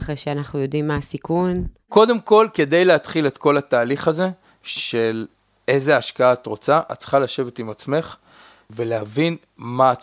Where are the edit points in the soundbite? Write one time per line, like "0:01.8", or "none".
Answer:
none